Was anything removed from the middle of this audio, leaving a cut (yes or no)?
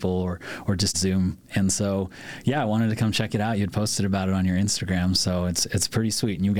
yes